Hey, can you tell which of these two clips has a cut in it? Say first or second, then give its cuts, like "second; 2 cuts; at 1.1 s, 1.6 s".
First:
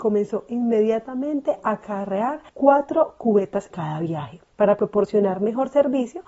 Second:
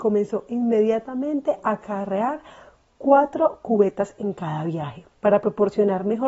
first; 2 cuts; at 2.5 s, 3.7 s